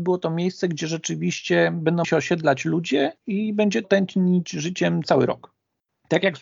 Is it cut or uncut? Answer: cut